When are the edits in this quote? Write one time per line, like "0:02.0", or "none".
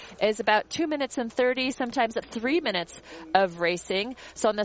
0:02.2

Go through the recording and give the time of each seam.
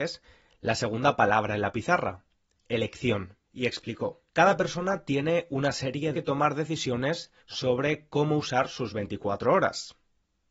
0:03.4
0:04.3
0:06.1
0:07.4

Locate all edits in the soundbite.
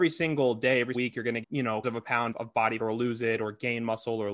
0:00.9
0:01.4
0:01.8
0:02.3
0:02.8

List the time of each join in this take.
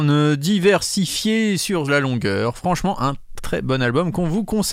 0:03.4

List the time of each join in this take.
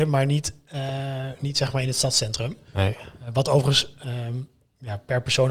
none

